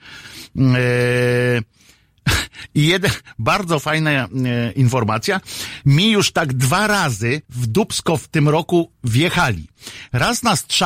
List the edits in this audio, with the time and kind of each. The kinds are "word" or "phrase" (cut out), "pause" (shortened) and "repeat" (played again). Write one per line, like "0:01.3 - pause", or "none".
0:07.4 - pause